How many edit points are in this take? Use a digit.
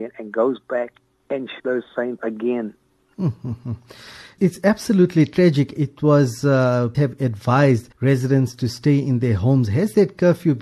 6